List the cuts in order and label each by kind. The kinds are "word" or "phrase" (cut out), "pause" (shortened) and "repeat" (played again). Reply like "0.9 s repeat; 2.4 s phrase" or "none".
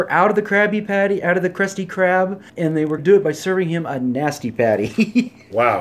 2.5 s pause; 3.0 s word